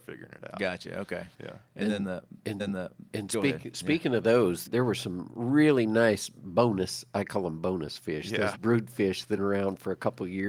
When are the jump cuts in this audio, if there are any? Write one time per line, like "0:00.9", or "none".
0:01.3
0:02.6
0:04.7
0:08.5
0:09.4